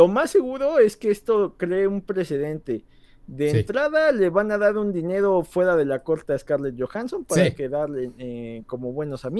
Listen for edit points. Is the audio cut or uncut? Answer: uncut